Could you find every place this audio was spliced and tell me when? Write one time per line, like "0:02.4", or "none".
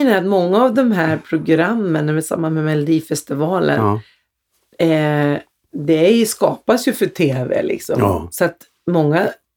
none